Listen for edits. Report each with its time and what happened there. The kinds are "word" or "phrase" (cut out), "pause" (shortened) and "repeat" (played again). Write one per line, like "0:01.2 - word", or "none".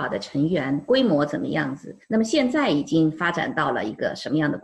0:02.0 - pause